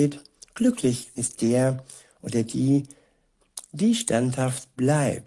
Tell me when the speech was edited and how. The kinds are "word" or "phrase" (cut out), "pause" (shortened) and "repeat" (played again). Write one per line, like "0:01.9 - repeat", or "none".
0:01.2 - phrase